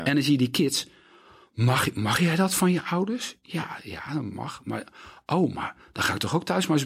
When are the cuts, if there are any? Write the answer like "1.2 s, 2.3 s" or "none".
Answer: none